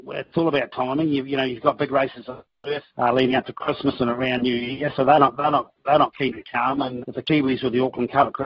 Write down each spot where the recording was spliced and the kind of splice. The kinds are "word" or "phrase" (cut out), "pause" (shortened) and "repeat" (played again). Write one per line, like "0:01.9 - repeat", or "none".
0:02.9 - pause
0:07.0 - word